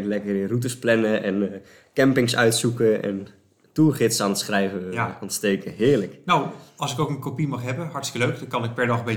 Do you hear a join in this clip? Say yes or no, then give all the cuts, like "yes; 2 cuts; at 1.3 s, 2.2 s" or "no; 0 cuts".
no; 0 cuts